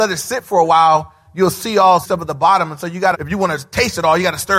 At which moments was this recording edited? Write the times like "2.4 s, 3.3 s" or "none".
2.0 s, 3.1 s